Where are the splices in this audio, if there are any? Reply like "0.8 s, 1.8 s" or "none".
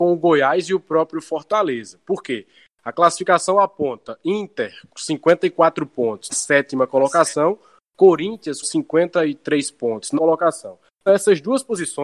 4.9 s, 6.3 s, 8.6 s, 10.1 s, 11.1 s